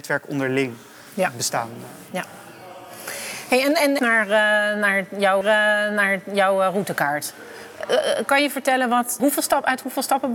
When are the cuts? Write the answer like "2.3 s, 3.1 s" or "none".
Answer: 4.0 s, 5.4 s, 9.2 s